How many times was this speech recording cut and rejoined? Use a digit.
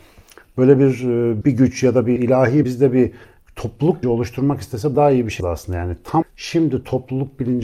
7